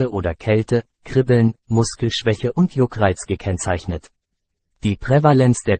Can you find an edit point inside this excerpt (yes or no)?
no